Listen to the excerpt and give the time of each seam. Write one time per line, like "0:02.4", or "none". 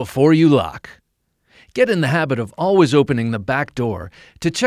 none